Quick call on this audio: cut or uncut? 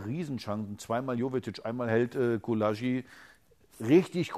uncut